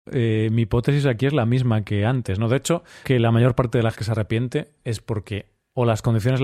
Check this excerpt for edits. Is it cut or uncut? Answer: cut